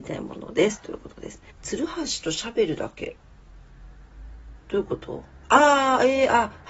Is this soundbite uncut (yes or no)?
no